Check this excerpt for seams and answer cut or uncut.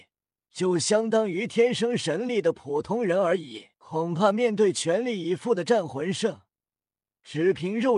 cut